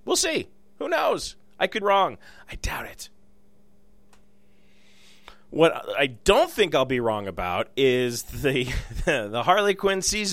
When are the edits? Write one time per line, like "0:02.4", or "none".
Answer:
0:01.8